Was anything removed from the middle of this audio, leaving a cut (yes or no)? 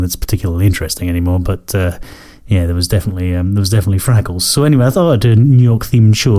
no